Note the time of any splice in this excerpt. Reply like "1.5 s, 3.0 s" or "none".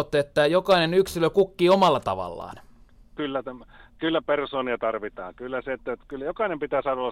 none